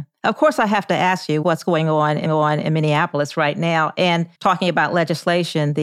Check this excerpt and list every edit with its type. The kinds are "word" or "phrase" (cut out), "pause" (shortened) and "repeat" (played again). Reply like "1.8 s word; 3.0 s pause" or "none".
1.4 s word; 2.2 s repeat; 4.3 s pause